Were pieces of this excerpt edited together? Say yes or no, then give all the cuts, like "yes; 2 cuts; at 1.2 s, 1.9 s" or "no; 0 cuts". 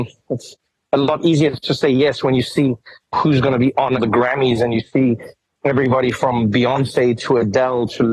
no; 0 cuts